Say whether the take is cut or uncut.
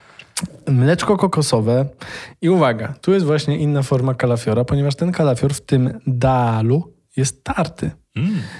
uncut